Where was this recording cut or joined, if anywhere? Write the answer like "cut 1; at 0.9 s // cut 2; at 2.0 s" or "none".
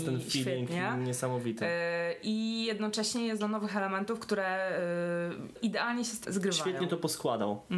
cut 1; at 3.4 s // cut 2; at 5.6 s // cut 3; at 6.2 s